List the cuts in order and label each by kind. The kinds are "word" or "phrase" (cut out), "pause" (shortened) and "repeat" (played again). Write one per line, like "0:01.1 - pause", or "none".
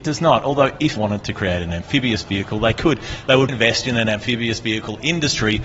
0:01.0 - word
0:03.5 - word

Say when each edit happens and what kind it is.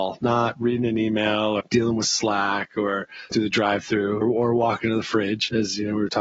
0:01.6 - word
0:03.3 - word
0:04.2 - word

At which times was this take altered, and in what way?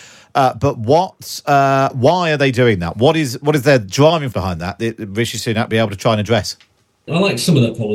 0:04.3 - word
0:05.7 - word

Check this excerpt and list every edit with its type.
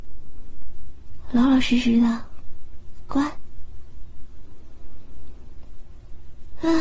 none

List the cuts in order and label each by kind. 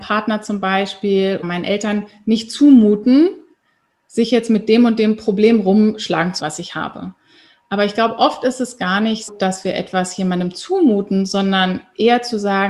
0:01.4 - word
0:06.4 - word
0:09.3 - word

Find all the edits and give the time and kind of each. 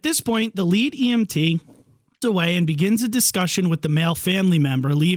0:02.2 - word

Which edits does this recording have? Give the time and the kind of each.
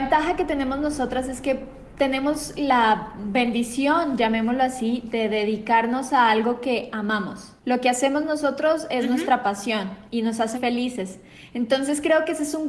0:07.6 - pause
0:10.5 - word

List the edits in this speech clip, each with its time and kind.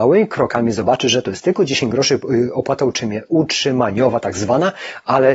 none

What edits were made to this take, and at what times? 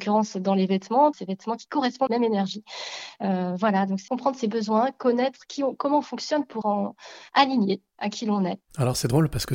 0:01.1 - word
0:02.1 - phrase
0:04.1 - word
0:06.6 - word

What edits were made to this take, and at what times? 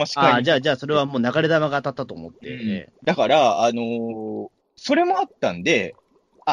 0:03.0 - pause
0:04.6 - pause

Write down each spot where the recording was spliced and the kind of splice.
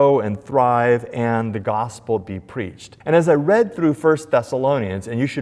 0:03.0 - pause

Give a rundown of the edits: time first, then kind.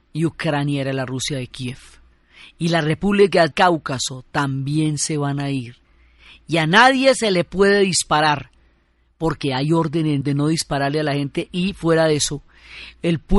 0:03.5 - word
0:10.2 - word

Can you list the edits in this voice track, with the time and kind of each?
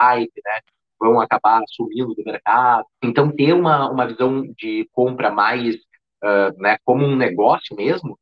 0:02.9 - pause

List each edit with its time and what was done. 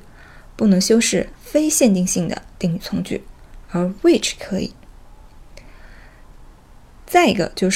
none

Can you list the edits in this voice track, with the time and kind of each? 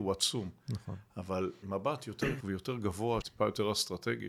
0:01.6 - phrase
0:02.4 - word
0:03.2 - word

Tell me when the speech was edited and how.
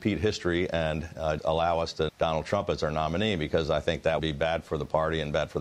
0:01.4 - word
0:02.1 - word
0:04.2 - word

